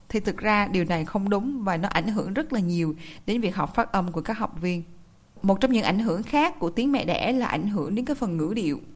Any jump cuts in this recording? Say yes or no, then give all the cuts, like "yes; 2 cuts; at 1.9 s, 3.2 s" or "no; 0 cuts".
no; 0 cuts